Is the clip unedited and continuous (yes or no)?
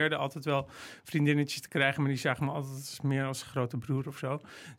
yes